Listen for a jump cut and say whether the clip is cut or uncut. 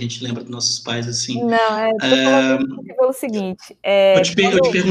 uncut